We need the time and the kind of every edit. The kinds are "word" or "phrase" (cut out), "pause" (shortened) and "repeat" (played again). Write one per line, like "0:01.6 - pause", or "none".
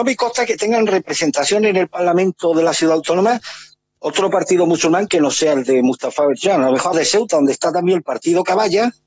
0:06.9 - word